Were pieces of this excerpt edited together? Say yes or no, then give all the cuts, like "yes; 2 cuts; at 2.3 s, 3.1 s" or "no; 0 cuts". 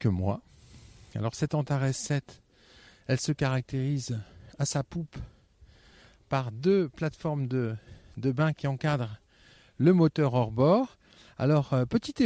no; 0 cuts